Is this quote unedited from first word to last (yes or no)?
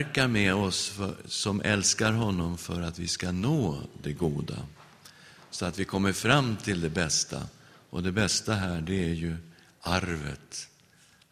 yes